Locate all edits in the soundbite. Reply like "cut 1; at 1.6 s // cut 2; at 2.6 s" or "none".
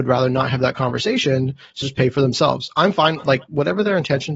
cut 1; at 1.8 s